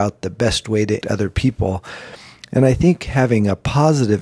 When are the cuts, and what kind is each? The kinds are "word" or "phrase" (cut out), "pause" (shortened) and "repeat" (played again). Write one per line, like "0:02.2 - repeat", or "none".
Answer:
0:01.0 - word